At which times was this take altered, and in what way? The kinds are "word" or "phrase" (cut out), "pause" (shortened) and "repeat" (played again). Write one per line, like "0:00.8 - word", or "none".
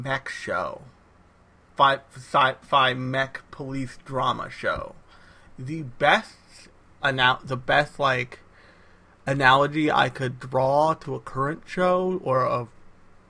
0:01.1 - pause